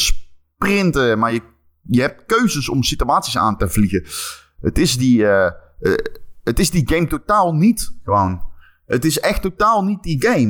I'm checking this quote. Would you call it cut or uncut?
uncut